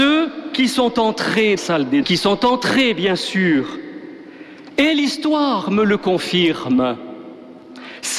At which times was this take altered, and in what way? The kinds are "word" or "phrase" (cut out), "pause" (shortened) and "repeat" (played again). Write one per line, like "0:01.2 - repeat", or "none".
0:01.6 - phrase
0:02.0 - phrase